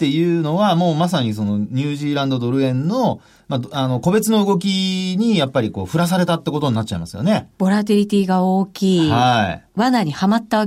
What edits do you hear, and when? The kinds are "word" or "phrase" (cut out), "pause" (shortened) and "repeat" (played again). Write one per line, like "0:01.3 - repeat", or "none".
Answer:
0:07.5 - pause